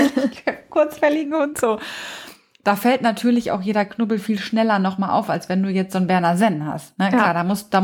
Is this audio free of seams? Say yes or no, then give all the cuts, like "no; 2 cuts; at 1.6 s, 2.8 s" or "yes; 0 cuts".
yes; 0 cuts